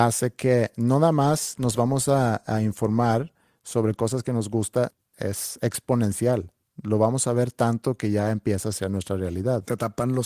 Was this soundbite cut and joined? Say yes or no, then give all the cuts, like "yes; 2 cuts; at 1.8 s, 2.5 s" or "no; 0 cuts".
no; 0 cuts